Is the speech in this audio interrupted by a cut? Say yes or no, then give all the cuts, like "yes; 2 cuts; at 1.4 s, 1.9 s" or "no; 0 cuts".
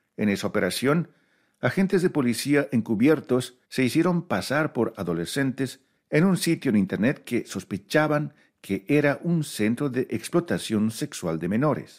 yes; 2 cuts; at 3.6 s, 4.9 s